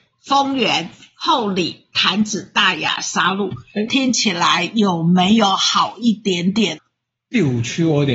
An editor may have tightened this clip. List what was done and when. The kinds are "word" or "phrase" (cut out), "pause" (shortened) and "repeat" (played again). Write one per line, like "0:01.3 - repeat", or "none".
none